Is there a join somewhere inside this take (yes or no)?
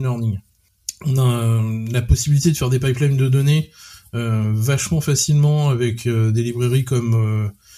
no